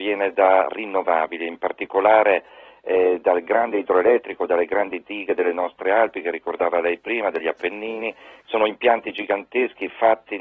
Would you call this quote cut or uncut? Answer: uncut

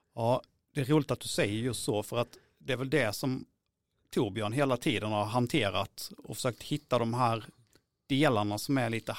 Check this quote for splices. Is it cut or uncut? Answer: uncut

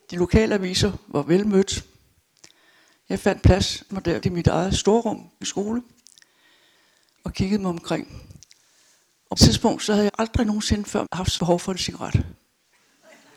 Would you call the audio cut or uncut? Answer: cut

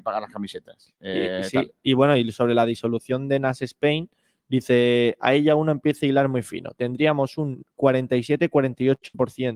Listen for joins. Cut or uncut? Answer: uncut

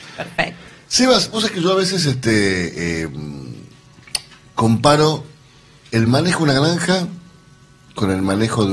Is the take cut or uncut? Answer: uncut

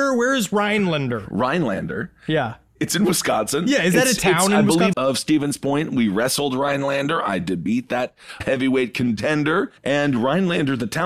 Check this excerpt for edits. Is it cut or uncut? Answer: cut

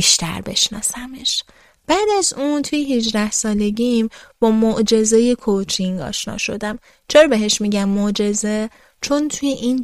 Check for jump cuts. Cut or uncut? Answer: uncut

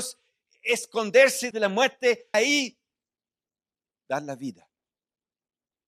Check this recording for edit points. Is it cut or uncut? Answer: cut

